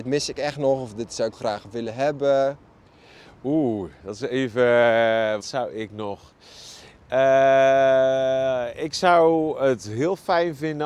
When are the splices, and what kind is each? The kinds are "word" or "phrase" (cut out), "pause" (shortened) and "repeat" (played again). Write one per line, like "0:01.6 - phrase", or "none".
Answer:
0:01.3 - word
0:05.4 - word